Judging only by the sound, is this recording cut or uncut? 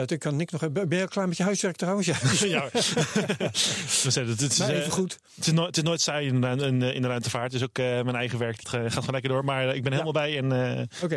cut